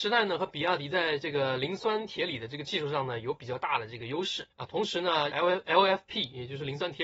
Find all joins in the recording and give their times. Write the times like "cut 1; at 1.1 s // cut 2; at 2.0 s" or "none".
cut 1; at 4.5 s // cut 2; at 5.3 s

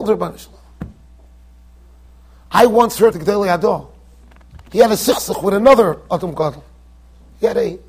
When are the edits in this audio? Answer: cut 1; at 3.1 s // cut 2; at 4.6 s

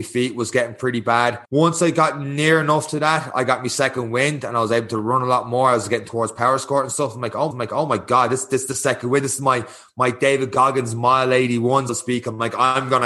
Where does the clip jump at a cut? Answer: cut 1; at 1.4 s // cut 2; at 7.5 s // cut 3; at 11.9 s

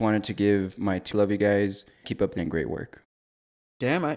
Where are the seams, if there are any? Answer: cut 1; at 1.1 s // cut 2; at 2.0 s // cut 3; at 2.4 s

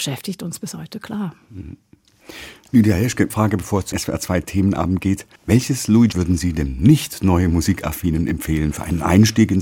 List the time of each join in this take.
cut 1; at 3.3 s // cut 2; at 3.9 s // cut 3; at 5.4 s // cut 4; at 6.1 s

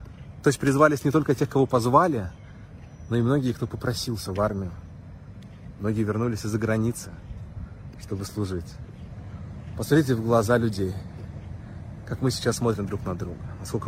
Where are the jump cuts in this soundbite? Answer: none

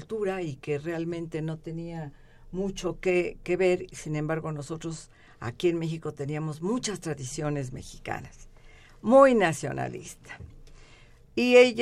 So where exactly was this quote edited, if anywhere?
none

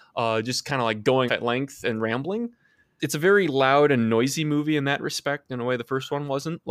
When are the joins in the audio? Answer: cut 1; at 1.3 s // cut 2; at 3.0 s

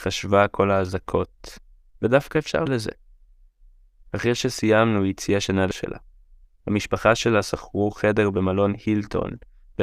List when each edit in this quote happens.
cut 1; at 2.7 s // cut 2; at 5.7 s

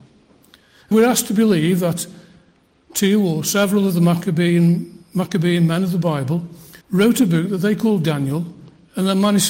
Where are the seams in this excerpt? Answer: cut 1; at 0.9 s // cut 2; at 5.0 s // cut 3; at 6.8 s

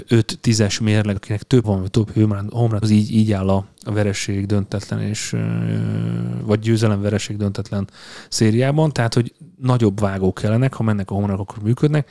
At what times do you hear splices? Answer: cut 1; at 1.2 s // cut 2; at 1.6 s // cut 3; at 2.8 s

